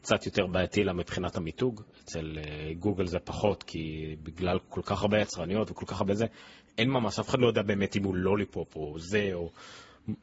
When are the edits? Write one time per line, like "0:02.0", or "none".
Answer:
none